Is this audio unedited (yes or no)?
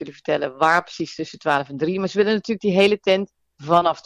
yes